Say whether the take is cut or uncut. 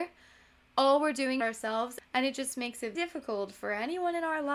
cut